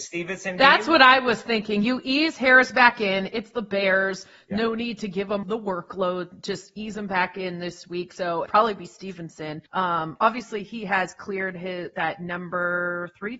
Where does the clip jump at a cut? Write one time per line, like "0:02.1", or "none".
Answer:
0:05.4
0:08.5
0:09.7